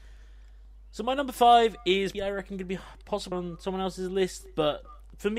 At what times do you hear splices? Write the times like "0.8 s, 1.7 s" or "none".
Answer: 2.1 s, 3.3 s